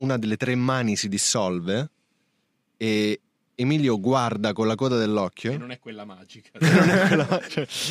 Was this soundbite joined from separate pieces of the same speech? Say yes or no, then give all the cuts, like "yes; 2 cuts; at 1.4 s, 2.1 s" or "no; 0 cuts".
no; 0 cuts